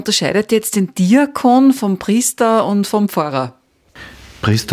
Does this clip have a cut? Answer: no; 0 cuts

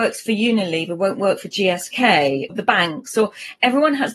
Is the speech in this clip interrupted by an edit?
yes; 1 cut; at 2.5 s

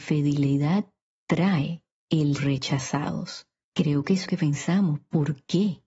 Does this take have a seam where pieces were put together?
yes; 2 cuts; at 2.4 s, 4.3 s

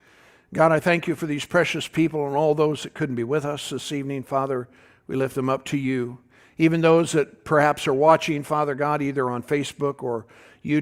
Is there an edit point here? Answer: no; 0 cuts

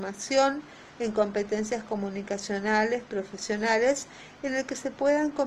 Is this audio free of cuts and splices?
yes; 0 cuts

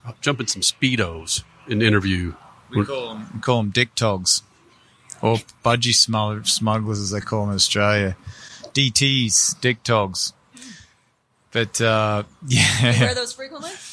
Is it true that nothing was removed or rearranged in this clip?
yes; 0 cuts

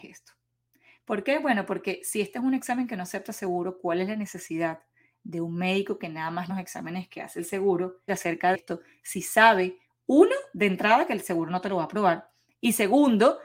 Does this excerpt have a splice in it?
yes; 3 cuts; at 6.5 s, 8.1 s, 8.5 s

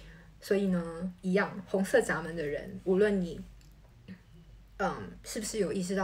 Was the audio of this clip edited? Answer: no; 0 cuts

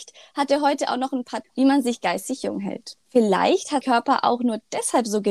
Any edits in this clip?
yes; 3 cuts; at 1.4 s, 3.0 s, 3.8 s

